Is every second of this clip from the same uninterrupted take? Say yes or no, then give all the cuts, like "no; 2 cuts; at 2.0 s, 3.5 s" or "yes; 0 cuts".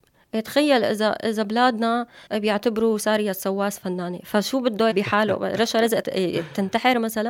no; 3 cuts; at 2.3 s, 4.9 s, 6.0 s